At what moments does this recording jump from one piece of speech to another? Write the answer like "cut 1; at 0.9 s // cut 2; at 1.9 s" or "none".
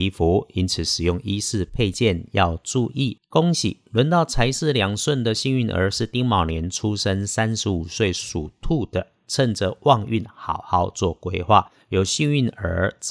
cut 1; at 11.8 s